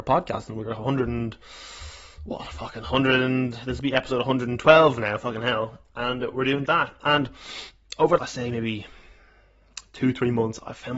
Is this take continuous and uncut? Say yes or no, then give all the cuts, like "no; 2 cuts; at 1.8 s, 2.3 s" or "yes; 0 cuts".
no; 2 cuts; at 6.6 s, 8.2 s